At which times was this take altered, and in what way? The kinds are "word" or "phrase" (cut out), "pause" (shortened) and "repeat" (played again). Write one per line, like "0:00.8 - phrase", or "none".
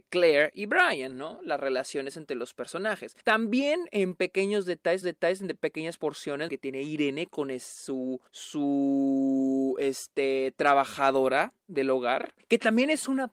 0:03.2 - pause
0:05.0 - repeat
0:06.5 - phrase
0:08.3 - pause
0:12.4 - pause